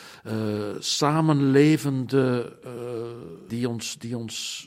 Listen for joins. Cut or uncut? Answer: cut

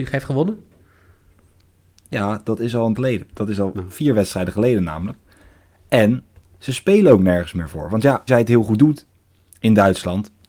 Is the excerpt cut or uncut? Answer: cut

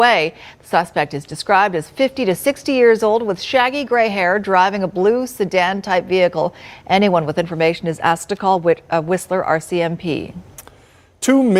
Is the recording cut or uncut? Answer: uncut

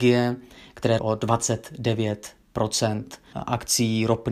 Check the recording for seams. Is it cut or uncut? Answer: cut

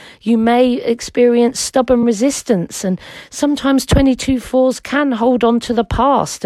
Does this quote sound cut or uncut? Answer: uncut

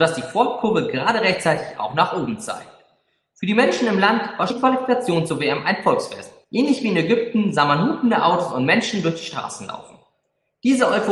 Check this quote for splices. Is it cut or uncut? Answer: cut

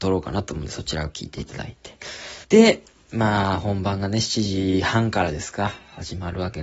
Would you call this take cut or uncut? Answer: cut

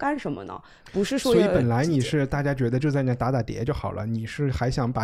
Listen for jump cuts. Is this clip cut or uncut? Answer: cut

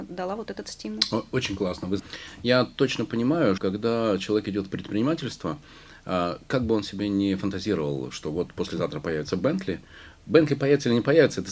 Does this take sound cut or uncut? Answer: cut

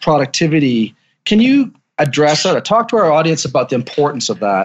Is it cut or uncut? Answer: uncut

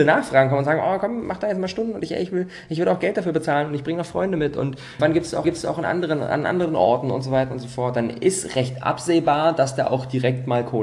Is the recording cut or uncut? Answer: cut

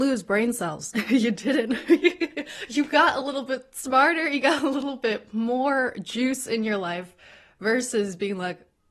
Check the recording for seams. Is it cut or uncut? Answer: uncut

